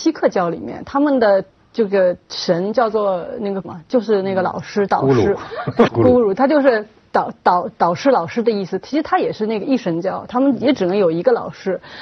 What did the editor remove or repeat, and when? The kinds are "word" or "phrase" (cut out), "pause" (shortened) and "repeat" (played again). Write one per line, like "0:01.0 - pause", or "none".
0:03.6 - word
0:05.9 - word